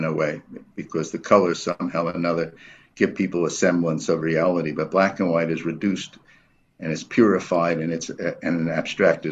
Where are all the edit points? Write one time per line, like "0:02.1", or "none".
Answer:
none